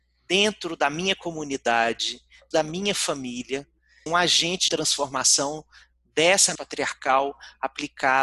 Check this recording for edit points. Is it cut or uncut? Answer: cut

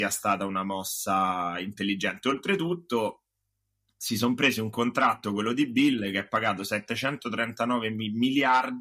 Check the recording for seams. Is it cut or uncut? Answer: uncut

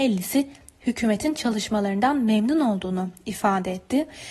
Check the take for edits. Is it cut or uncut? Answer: uncut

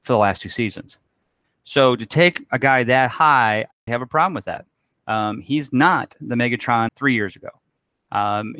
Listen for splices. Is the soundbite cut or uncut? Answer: cut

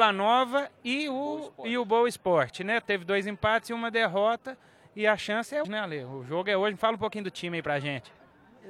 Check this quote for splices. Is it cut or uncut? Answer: cut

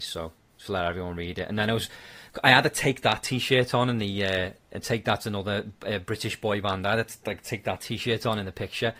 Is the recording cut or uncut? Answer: uncut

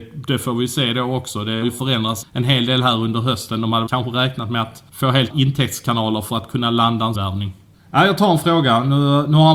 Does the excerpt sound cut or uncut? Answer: cut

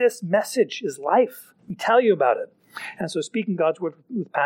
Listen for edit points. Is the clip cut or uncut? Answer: cut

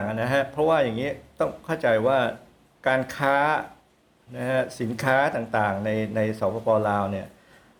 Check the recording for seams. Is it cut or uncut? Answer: uncut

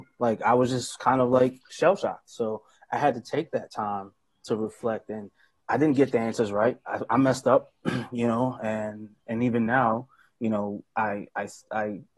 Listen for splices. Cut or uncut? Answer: uncut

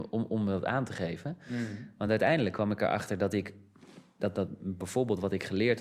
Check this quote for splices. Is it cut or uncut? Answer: uncut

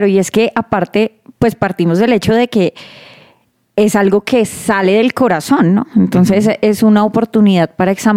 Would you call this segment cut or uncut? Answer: uncut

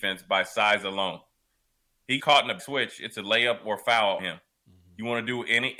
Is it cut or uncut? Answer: cut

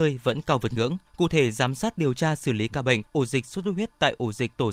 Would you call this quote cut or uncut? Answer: cut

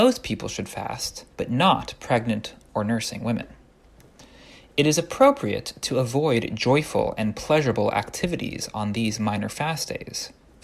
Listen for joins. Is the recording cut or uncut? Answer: cut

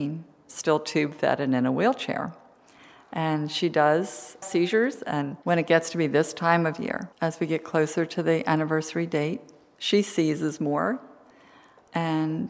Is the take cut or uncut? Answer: cut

